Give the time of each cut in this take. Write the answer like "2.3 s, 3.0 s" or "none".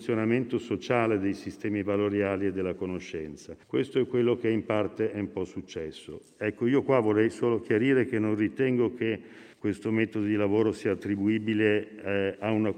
3.6 s, 9.5 s